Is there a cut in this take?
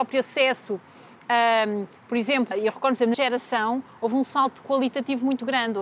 yes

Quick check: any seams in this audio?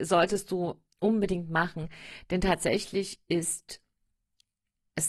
no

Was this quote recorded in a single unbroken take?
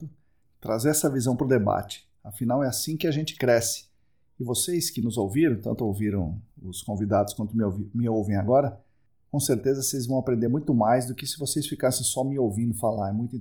yes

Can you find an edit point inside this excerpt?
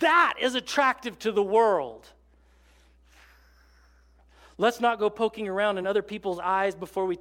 no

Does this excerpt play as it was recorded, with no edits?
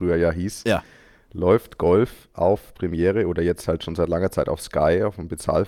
yes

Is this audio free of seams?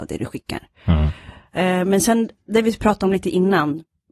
yes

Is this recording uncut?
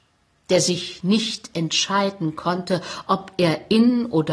yes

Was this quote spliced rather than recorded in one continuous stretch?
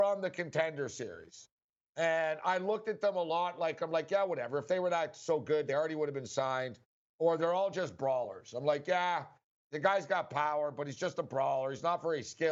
no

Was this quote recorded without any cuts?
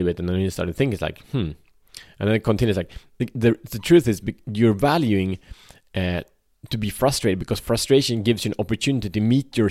yes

